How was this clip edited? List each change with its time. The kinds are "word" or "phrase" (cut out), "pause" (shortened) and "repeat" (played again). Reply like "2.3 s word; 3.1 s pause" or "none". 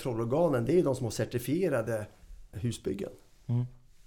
2.5 s word